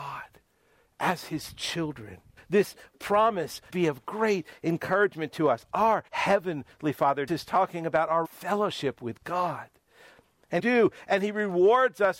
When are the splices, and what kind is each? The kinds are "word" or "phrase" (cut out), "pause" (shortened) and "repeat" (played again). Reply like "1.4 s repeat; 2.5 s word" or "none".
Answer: 2.4 s pause; 3.7 s word; 6.1 s pause; 7.3 s word; 8.2 s phrase; 10.6 s phrase